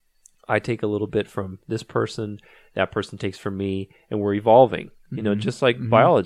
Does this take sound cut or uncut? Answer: uncut